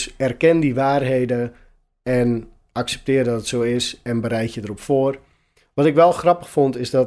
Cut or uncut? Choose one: uncut